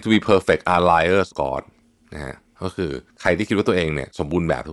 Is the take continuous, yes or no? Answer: no